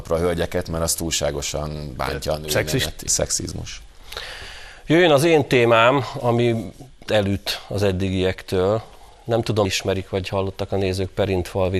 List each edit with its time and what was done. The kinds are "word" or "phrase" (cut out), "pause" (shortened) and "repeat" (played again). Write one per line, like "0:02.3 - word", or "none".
0:03.1 - word
0:07.1 - word
0:09.6 - word